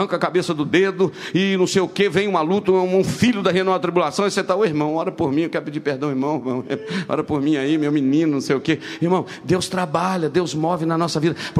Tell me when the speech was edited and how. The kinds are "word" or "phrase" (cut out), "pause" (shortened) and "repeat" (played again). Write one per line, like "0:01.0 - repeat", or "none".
none